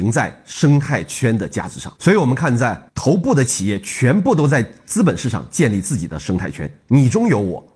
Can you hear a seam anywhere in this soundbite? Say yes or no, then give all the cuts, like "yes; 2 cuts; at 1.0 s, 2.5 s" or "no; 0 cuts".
yes; 2 cuts; at 2.0 s, 2.9 s